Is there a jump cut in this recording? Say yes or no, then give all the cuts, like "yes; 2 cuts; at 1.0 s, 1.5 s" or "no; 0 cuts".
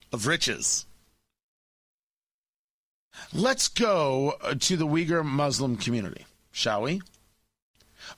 no; 0 cuts